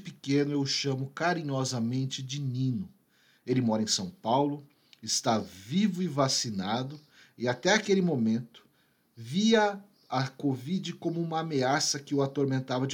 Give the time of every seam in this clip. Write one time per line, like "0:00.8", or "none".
none

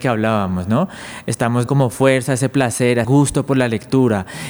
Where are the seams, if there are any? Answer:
0:01.7
0:03.0

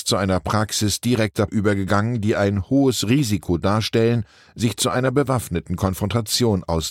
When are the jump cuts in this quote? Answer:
0:01.5

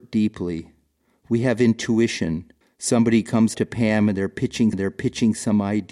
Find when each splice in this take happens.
0:02.6
0:03.5
0:04.7

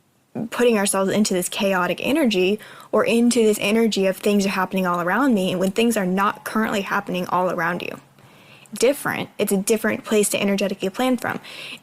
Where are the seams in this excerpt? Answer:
0:08.8

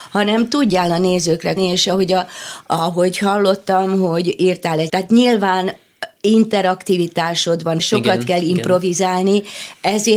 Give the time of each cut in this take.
0:01.6
0:04.9
0:07.8

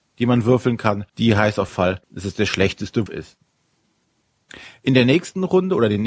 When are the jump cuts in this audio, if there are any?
0:01.1
0:01.7
0:02.0
0:03.1

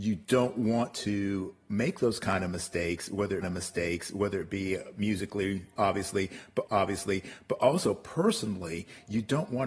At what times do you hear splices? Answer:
0:03.4
0:06.7

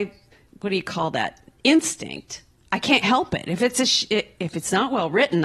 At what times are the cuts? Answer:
none

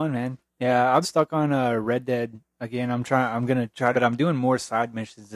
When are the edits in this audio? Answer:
0:01.0
0:03.9

